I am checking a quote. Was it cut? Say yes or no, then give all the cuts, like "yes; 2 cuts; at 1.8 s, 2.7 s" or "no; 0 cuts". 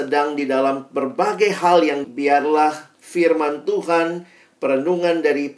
yes; 1 cut; at 2.0 s